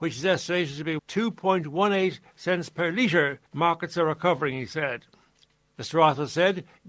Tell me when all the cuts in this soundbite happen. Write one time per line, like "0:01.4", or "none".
0:01.0
0:03.5